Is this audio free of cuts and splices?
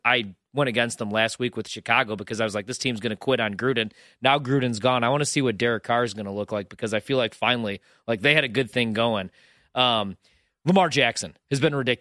yes; 0 cuts

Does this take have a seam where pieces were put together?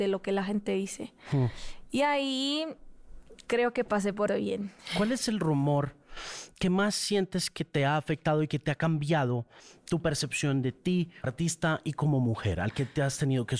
yes; 2 cuts; at 4.3 s, 11.2 s

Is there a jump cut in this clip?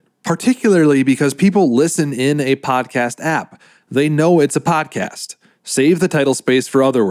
no; 0 cuts

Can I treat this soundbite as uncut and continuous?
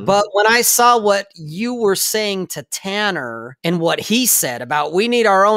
no; 1 cut; at 3.6 s

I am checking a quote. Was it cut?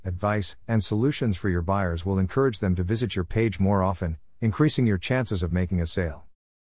no; 0 cuts

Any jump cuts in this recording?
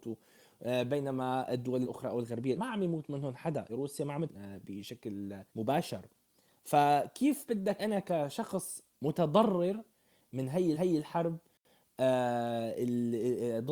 yes; 7 cuts; at 1.8 s, 2.6 s, 3.7 s, 4.3 s, 5.5 s, 7.8 s, 10.8 s

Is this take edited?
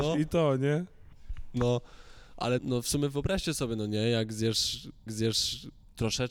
yes; 2 cuts; at 2.6 s, 5.1 s

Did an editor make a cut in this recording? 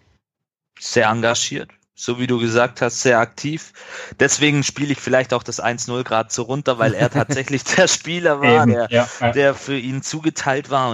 no; 0 cuts

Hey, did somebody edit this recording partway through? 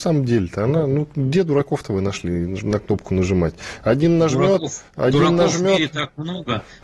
yes; 1 cut; at 4.9 s

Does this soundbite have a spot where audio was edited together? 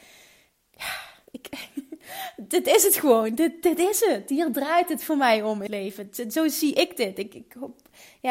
yes; 1 cut; at 5.7 s

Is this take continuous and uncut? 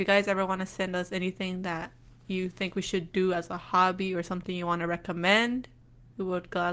yes; 0 cuts

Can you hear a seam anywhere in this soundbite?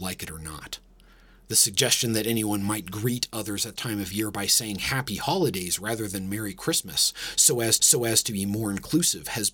yes; 2 cuts; at 3.8 s, 7.8 s

